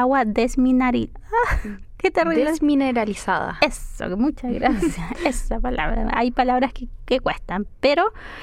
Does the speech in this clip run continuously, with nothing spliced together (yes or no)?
no